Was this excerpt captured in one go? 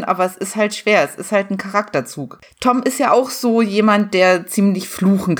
yes; 0 cuts

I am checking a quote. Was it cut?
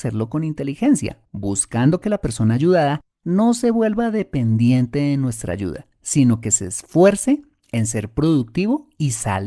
yes; 1 cut; at 1.2 s

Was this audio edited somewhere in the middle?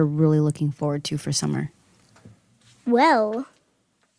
no; 0 cuts

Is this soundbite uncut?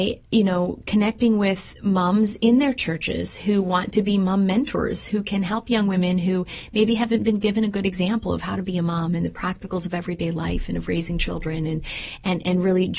yes; 0 cuts

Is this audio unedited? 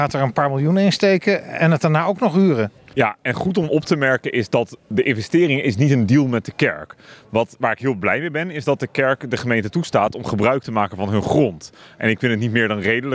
yes; 0 cuts

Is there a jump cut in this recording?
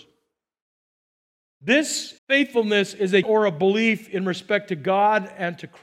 yes; 2 cuts; at 2.2 s, 3.2 s

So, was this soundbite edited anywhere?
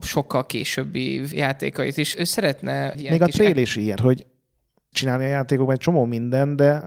yes; 5 cuts; at 1.3 s, 2.1 s, 2.9 s, 4.0 s, 4.9 s

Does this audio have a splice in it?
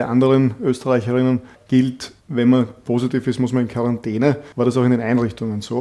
yes; 2 cuts; at 2.2 s, 4.5 s

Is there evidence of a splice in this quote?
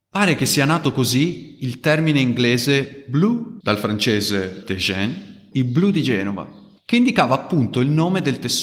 yes; 3 cuts; at 3.6 s, 4.6 s, 5.5 s

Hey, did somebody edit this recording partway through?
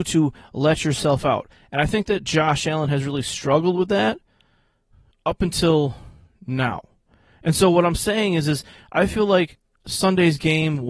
no; 0 cuts

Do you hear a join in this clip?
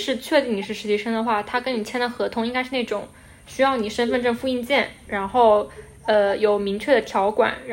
no; 0 cuts

